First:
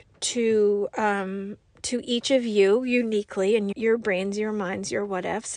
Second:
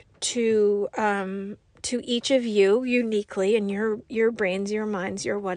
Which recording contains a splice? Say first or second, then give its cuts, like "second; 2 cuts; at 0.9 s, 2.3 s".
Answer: first; 1 cut; at 3.7 s